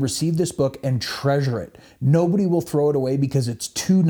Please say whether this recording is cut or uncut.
uncut